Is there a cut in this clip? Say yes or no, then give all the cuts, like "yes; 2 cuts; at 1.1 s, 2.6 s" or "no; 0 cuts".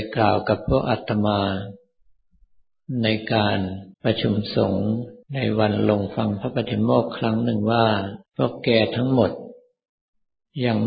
yes; 3 cuts; at 3.9 s, 5.2 s, 8.3 s